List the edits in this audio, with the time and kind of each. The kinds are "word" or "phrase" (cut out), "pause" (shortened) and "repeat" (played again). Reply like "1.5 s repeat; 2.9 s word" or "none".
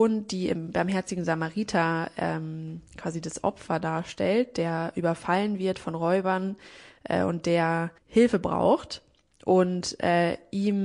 8.0 s pause